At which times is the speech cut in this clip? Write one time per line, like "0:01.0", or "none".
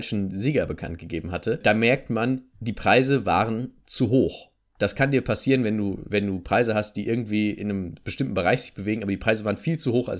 none